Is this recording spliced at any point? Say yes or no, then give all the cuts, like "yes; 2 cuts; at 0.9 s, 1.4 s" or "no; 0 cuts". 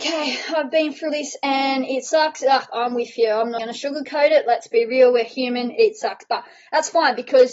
yes; 2 cuts; at 1.1 s, 3.6 s